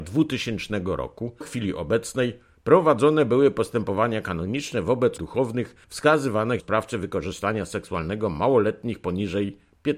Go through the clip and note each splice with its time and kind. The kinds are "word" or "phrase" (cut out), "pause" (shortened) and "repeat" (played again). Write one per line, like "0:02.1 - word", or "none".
0:01.4 - word
0:05.2 - word
0:06.6 - word